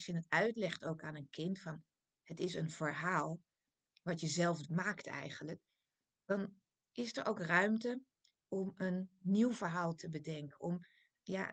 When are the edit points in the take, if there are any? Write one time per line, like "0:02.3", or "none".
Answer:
none